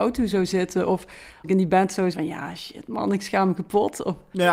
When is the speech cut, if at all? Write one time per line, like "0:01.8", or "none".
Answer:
0:01.4
0:02.1

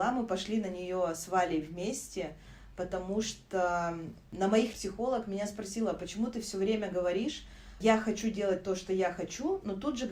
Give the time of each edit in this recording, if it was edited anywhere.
0:04.7

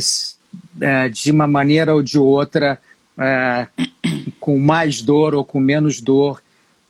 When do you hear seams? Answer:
none

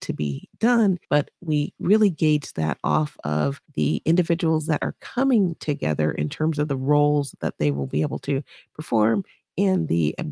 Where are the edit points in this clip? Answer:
0:01.0
0:03.6

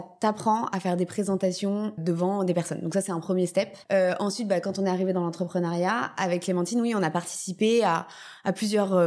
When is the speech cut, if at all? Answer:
0:02.0

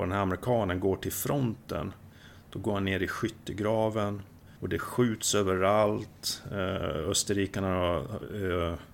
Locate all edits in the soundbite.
0:04.6

